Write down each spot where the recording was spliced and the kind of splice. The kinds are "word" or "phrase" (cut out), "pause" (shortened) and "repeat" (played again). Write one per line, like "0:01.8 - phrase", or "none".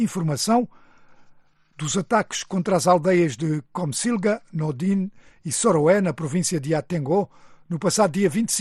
none